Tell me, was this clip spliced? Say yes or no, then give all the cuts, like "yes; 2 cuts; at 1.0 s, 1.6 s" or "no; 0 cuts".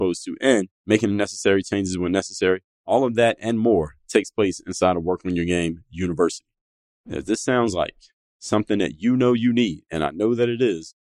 no; 0 cuts